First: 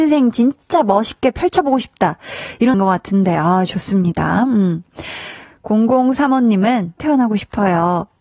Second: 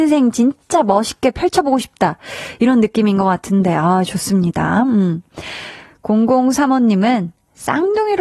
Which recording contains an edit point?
first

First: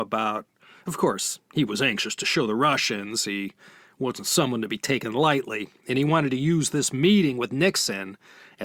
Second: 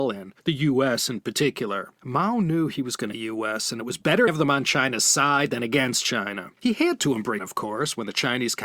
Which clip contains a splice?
second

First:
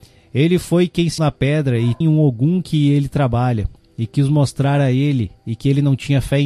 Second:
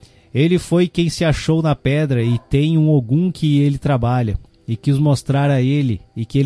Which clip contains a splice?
first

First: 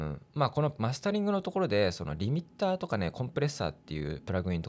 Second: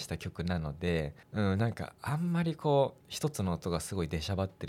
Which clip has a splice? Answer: second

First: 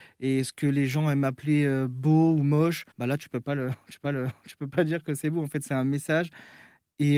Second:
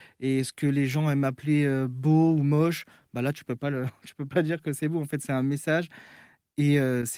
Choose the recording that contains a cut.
first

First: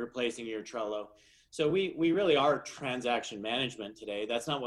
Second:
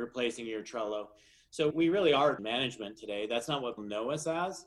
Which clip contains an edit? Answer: second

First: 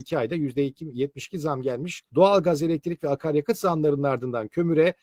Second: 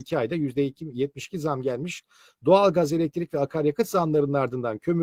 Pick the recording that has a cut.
first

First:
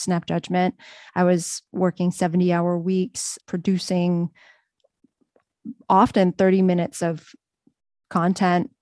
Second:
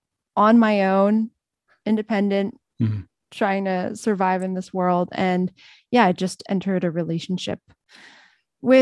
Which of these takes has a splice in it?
first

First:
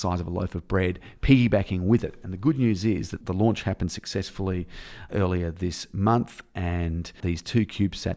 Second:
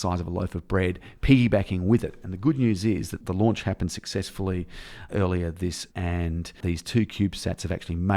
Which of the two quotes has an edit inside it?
second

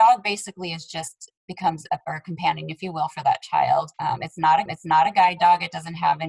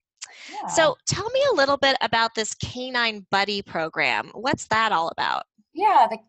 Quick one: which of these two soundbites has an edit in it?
first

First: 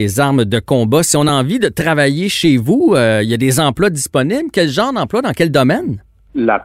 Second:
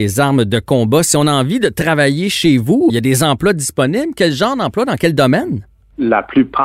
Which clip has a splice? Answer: second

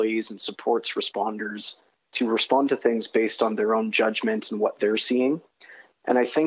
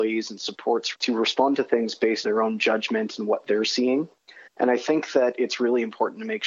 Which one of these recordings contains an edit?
second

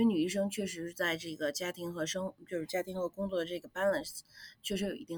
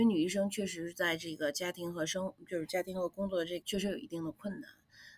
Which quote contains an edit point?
second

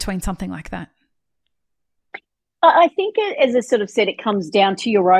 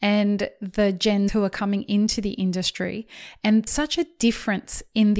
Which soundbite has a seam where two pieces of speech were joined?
second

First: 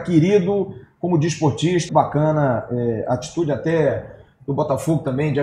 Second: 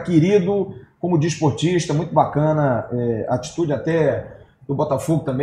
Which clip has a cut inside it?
first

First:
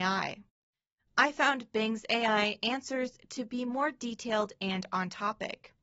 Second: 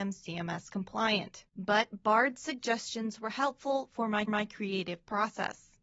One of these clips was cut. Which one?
second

